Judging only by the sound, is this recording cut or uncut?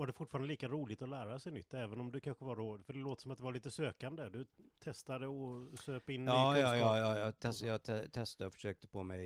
cut